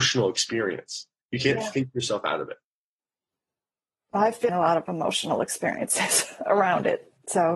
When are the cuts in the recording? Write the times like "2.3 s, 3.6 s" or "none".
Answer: 4.5 s